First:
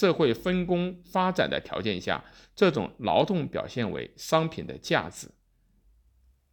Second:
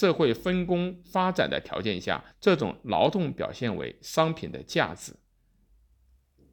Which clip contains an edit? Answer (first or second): second